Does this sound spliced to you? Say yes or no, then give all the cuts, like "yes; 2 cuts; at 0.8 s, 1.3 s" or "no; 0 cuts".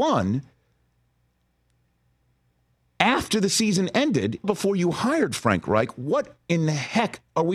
yes; 1 cut; at 4.4 s